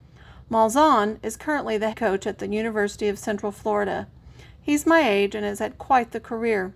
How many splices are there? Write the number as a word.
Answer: one